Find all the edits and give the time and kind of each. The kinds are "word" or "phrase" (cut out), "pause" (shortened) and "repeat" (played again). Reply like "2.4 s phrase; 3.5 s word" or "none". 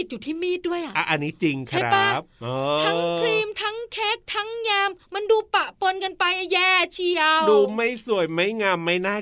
5.0 s pause